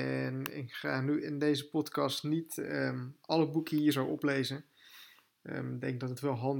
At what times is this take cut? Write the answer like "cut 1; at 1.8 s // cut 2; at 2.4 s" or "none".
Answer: none